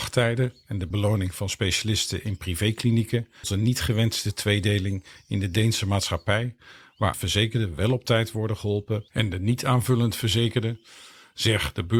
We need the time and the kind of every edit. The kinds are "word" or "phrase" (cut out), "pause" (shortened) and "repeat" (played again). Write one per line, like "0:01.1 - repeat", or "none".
0:00.9 - word
0:03.4 - phrase
0:07.1 - word
0:09.1 - pause